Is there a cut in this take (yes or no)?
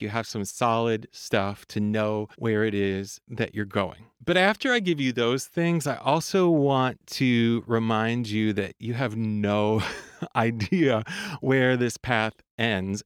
yes